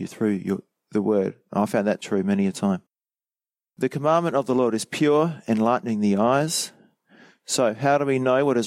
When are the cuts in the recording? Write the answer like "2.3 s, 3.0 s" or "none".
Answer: 2.0 s